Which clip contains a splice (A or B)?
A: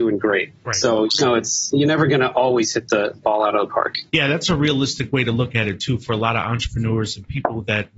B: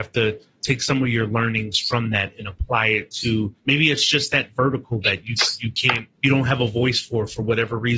B